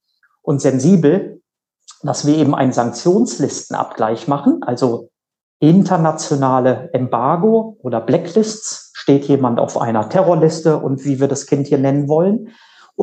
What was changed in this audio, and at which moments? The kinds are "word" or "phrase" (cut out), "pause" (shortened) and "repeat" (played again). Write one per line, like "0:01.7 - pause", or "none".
none